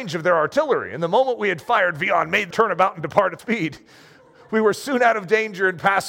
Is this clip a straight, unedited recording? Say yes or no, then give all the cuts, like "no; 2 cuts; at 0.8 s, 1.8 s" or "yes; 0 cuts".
no; 2 cuts; at 2.5 s, 3.4 s